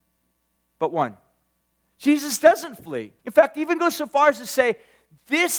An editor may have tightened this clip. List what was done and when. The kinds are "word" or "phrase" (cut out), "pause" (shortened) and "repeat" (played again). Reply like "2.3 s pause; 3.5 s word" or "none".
1.6 s pause; 3.2 s pause